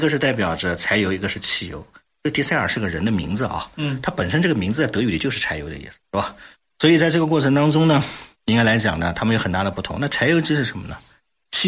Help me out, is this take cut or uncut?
uncut